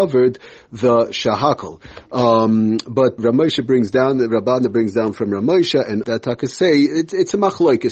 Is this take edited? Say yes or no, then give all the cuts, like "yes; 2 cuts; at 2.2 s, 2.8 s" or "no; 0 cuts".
yes; 2 cuts; at 3.2 s, 6.0 s